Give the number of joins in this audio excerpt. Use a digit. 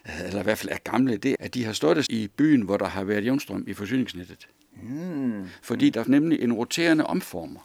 3